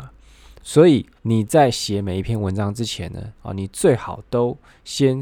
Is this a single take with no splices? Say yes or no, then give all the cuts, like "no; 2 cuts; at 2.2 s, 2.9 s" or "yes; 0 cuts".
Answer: no; 1 cut; at 1.2 s